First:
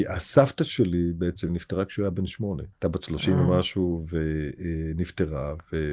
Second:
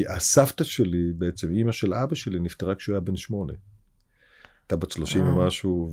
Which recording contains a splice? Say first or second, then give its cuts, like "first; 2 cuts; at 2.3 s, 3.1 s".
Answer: first; 2 cuts; at 1.5 s, 2.7 s